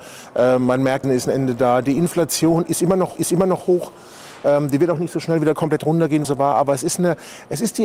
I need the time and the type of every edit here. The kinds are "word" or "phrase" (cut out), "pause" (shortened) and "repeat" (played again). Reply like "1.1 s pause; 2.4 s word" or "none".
1.0 s phrase; 3.2 s repeat; 6.2 s word